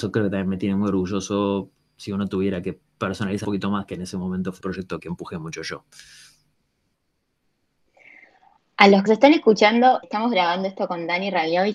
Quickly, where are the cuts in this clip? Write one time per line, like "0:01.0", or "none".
0:03.4
0:04.6
0:05.0
0:09.1
0:10.0